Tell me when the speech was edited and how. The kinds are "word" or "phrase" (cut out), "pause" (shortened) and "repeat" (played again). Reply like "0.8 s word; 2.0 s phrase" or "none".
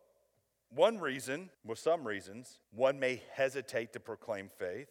1.5 s pause; 2.6 s pause